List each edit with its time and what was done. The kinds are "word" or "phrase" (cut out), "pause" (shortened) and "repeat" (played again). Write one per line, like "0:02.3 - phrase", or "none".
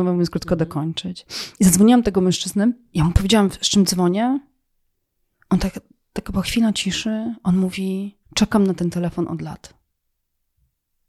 0:08.2 - pause